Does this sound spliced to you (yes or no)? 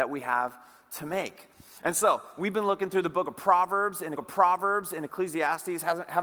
yes